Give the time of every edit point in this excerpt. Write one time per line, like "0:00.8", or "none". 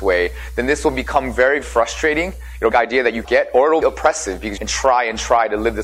0:01.6
0:02.7
0:03.2
0:03.8
0:04.6